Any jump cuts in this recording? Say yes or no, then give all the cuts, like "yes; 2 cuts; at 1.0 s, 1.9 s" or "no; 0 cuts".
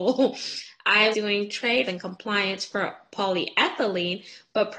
yes; 2 cuts; at 1.1 s, 1.9 s